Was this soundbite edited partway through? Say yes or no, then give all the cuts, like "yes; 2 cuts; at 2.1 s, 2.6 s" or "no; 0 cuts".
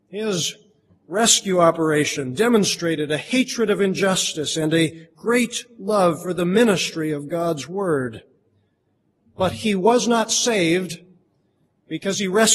no; 0 cuts